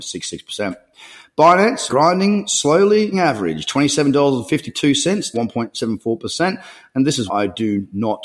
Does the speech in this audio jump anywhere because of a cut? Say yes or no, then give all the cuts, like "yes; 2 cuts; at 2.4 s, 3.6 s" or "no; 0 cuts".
yes; 4 cuts; at 1.9 s, 3.1 s, 5.3 s, 7.3 s